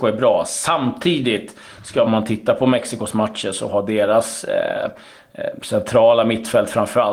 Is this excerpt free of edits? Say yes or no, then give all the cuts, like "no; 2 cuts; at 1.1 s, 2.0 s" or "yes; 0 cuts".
no; 1 cut; at 2.1 s